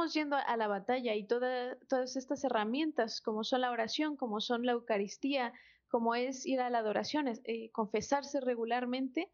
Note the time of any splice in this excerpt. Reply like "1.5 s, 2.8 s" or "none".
none